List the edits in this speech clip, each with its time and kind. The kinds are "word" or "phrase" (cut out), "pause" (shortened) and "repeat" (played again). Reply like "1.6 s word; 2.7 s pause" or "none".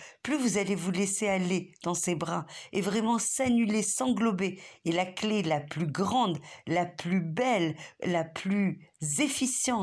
none